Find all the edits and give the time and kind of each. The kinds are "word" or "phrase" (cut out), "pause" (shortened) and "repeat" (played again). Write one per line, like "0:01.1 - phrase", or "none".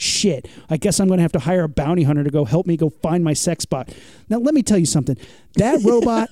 none